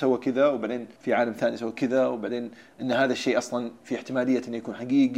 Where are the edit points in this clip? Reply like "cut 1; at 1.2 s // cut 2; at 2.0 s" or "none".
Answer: cut 1; at 1.0 s

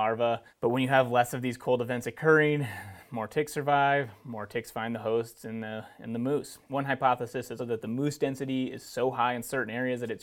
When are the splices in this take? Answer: cut 1; at 7.6 s

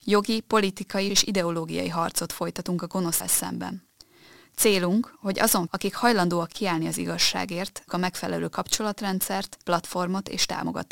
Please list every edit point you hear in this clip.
cut 1; at 1.1 s // cut 2; at 3.2 s // cut 3; at 5.7 s // cut 4; at 7.9 s // cut 5; at 9.6 s

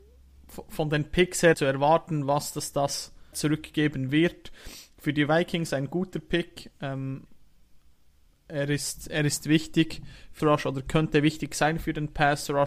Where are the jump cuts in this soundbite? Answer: cut 1; at 1.5 s // cut 2; at 3.3 s // cut 3; at 10.4 s

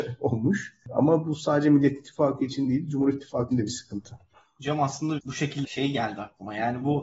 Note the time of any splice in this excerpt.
cut 1; at 3.5 s // cut 2; at 5.2 s // cut 3; at 5.6 s

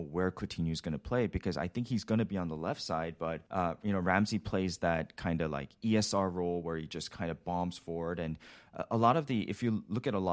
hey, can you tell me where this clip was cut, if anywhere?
cut 1; at 3.5 s

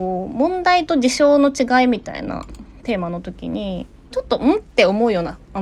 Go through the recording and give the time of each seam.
cut 1; at 4.1 s

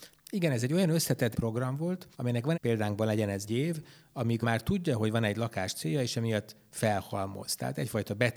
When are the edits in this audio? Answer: cut 1; at 1.3 s // cut 2; at 2.1 s // cut 3; at 2.5 s // cut 4; at 3.5 s // cut 5; at 4.4 s

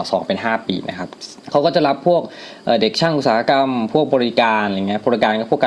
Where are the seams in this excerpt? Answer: cut 1; at 1.4 s

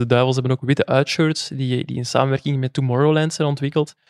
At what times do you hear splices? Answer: none

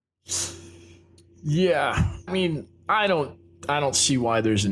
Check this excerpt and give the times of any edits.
cut 1; at 2.3 s

